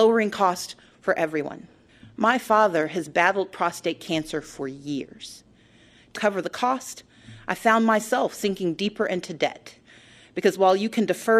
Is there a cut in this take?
yes; 2 cuts; at 1.9 s, 6.1 s

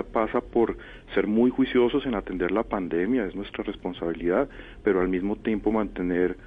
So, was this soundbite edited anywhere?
no; 0 cuts

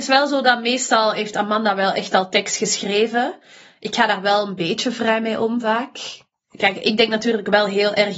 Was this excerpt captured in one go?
yes; 0 cuts

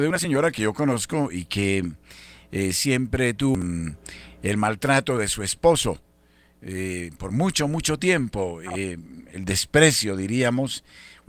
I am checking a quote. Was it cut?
no; 0 cuts

